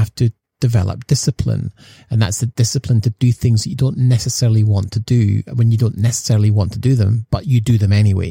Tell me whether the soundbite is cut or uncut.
uncut